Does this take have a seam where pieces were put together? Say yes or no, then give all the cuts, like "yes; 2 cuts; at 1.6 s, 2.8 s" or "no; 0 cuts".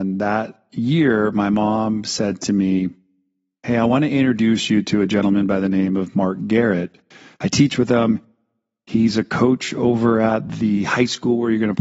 no; 0 cuts